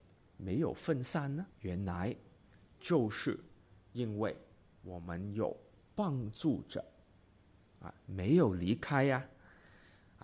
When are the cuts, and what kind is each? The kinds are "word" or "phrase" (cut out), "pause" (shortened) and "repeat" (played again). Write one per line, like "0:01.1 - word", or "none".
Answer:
0:01.5 - pause
0:05.7 - pause

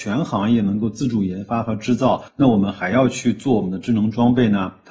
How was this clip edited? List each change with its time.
0:02.3 - pause

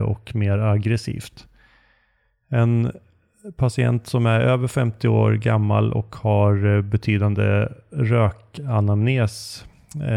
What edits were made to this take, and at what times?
none

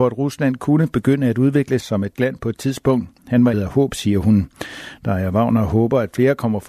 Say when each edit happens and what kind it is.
0:01.8 - word
0:02.2 - phrase
0:03.5 - word

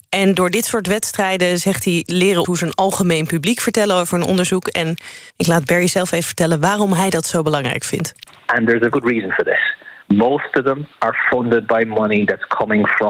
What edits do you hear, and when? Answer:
0:02.4 - word
0:05.3 - pause
0:08.9 - word
0:10.0 - pause
0:10.9 - pause

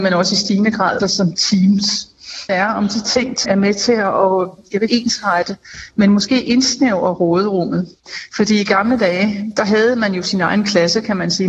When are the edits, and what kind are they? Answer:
0:01.0 - word
0:02.5 - phrase
0:03.4 - word
0:04.9 - word

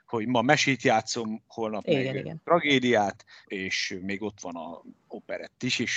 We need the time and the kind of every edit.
0:03.4 - word

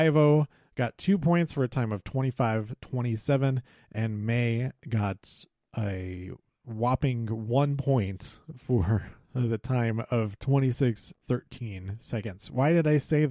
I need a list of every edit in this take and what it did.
0:11.2 - word

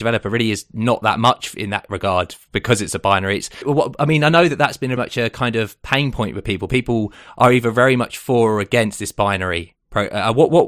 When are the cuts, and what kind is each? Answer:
0:03.6 - word
0:05.0 - word

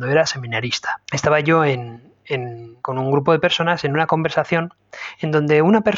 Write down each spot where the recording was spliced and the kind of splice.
0:01.0 - pause
0:02.8 - pause

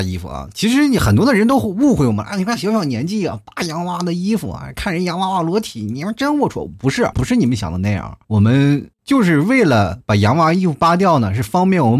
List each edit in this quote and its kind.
0:07.1 - word
0:08.2 - pause
0:08.9 - pause

